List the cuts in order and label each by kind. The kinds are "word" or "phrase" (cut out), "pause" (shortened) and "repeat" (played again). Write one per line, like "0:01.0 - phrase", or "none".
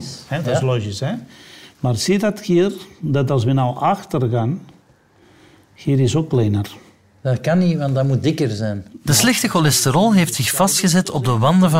none